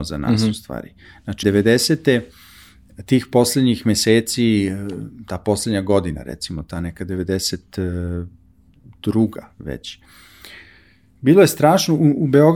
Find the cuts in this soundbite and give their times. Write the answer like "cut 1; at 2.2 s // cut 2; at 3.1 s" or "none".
cut 1; at 1.4 s